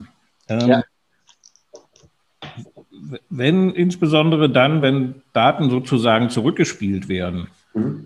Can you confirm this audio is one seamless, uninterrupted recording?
yes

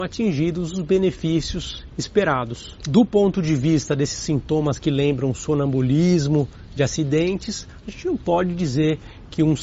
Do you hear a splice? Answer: no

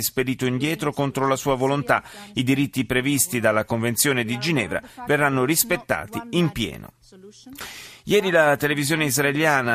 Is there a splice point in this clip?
no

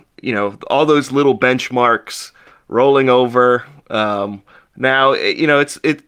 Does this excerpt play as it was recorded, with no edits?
yes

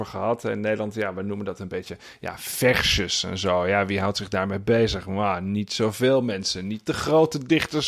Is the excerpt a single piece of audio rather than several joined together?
yes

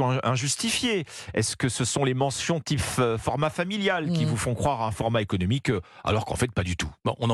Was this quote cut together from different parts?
no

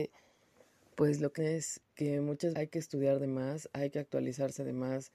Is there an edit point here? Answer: yes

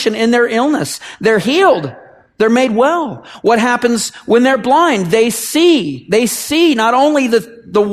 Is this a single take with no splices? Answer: yes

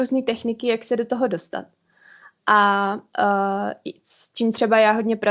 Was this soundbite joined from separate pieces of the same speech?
no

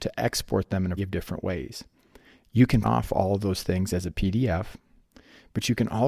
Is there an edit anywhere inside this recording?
yes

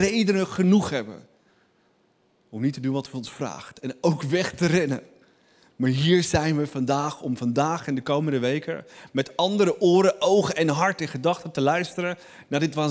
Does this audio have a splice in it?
no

